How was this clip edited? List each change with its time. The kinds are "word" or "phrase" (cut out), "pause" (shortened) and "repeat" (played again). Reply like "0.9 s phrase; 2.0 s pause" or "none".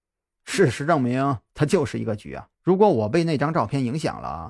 2.5 s pause